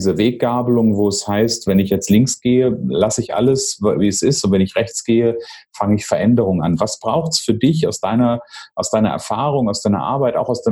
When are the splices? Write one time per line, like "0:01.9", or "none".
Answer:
none